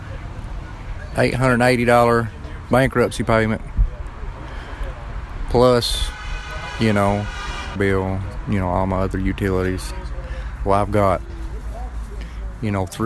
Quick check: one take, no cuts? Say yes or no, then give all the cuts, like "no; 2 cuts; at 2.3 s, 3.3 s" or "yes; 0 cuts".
no; 2 cuts; at 7.8 s, 10.7 s